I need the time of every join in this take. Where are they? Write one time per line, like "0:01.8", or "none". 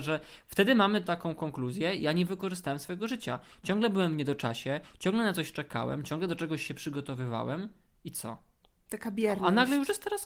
none